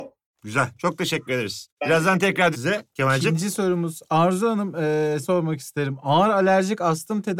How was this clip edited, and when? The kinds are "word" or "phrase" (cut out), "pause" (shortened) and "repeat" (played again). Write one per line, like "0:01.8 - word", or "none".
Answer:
0:02.5 - word
0:05.2 - word